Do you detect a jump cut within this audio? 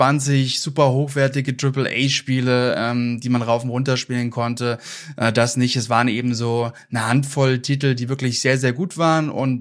no; 0 cuts

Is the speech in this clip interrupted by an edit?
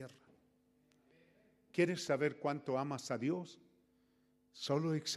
no; 0 cuts

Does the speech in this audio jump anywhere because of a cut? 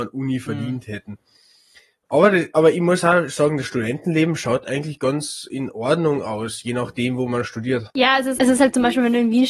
yes; 2 cuts; at 7.9 s, 8.4 s

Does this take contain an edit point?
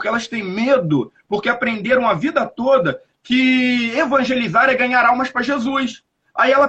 no; 0 cuts

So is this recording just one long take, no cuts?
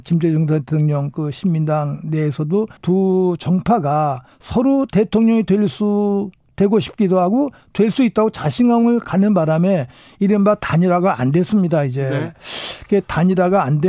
no; 2 cuts; at 2.8 s, 4.3 s

